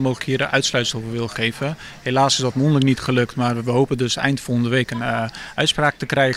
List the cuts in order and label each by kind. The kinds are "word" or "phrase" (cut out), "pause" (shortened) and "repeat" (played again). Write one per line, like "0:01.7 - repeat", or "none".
none